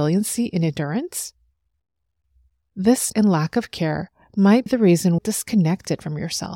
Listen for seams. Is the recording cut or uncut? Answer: cut